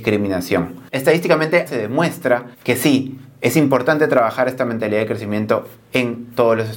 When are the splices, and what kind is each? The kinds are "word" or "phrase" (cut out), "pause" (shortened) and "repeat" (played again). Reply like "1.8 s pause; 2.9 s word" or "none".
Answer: 1.7 s word; 2.5 s pause